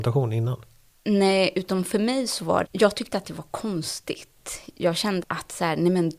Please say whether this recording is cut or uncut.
cut